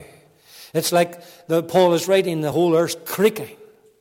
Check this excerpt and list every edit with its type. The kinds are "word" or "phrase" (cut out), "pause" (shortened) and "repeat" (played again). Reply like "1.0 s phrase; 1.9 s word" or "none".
none